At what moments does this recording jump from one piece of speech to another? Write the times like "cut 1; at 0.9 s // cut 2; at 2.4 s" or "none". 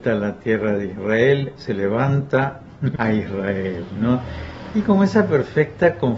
cut 1; at 1.6 s // cut 2; at 3.0 s // cut 3; at 4.8 s